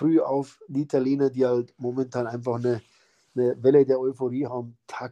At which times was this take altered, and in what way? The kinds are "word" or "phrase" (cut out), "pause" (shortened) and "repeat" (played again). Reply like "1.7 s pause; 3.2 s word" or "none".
none